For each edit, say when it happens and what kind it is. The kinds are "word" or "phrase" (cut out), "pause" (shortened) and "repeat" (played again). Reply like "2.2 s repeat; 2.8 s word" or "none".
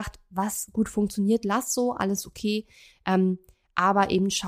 none